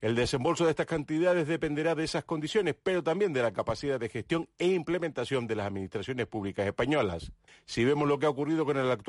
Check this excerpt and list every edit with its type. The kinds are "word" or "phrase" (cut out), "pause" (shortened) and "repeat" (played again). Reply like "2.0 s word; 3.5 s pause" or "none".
7.5 s pause